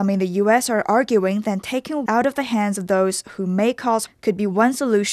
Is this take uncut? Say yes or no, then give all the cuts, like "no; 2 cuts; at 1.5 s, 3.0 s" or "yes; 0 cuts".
no; 2 cuts; at 2.1 s, 4.1 s